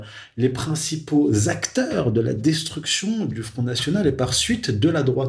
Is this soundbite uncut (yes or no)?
yes